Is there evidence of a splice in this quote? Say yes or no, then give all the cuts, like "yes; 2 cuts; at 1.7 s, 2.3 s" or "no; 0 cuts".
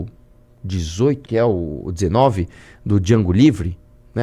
yes; 1 cut; at 1.2 s